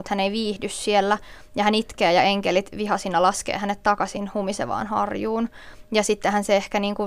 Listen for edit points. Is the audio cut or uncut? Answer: uncut